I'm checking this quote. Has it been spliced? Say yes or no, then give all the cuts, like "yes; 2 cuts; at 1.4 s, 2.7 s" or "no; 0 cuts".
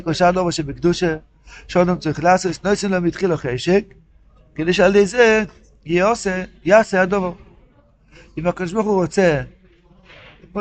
no; 0 cuts